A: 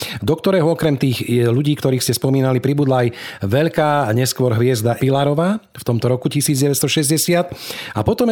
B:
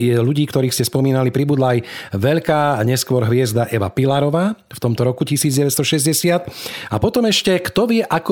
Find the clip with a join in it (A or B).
A